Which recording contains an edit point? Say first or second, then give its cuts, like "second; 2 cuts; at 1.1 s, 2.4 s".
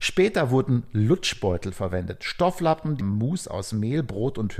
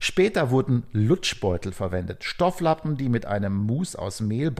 first; 1 cut; at 3.0 s